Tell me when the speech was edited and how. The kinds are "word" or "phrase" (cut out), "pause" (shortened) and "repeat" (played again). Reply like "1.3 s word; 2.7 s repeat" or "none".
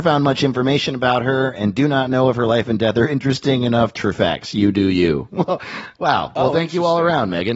4.0 s phrase